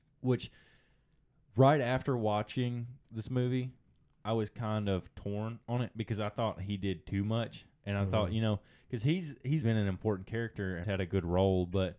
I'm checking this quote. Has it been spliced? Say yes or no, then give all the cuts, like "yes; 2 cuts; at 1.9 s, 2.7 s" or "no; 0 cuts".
yes; 2 cuts; at 9.6 s, 10.8 s